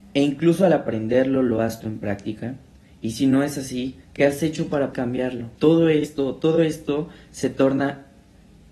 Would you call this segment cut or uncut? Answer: cut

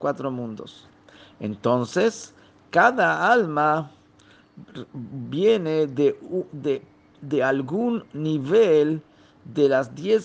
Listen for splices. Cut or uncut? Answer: uncut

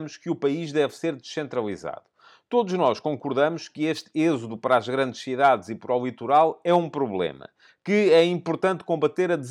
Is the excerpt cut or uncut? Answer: uncut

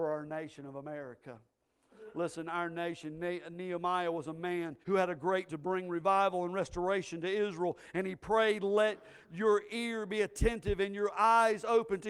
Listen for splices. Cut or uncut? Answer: cut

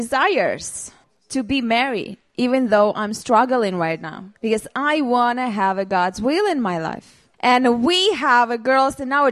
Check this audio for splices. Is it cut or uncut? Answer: cut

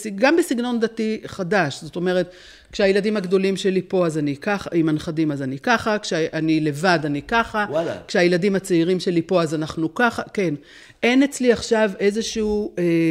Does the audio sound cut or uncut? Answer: uncut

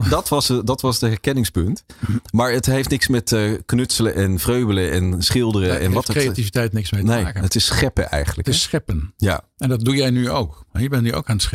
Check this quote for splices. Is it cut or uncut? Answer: uncut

